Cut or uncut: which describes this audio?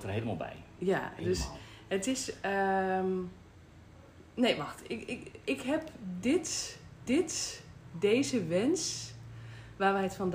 cut